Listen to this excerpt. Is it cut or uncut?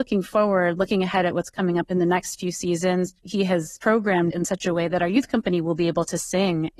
cut